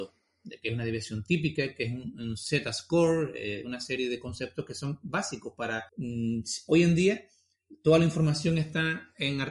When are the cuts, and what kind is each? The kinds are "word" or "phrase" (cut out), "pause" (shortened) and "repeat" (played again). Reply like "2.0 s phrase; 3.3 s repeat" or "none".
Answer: 5.9 s pause